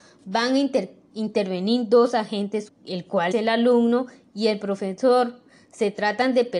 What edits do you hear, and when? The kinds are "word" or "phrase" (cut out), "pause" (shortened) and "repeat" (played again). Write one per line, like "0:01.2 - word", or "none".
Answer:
0:02.7 - word
0:03.3 - word